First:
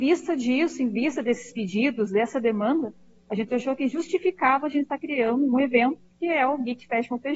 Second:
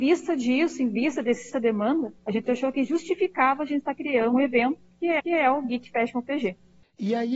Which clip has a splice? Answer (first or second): second